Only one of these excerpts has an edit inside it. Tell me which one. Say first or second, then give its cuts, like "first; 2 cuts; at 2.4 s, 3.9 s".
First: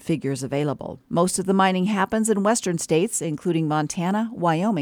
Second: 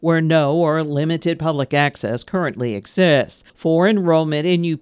second; 1 cut; at 3.5 s